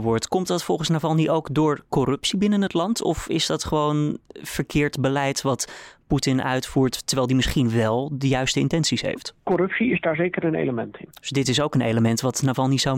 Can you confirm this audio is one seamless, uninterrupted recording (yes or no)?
yes